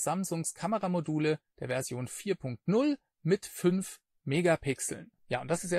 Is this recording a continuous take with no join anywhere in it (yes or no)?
yes